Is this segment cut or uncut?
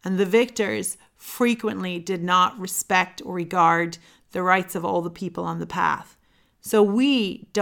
uncut